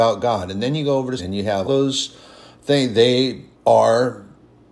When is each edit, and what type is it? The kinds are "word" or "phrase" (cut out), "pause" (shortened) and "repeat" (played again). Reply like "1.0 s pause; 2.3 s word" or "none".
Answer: 1.2 s word; 1.6 s word; 3.5 s pause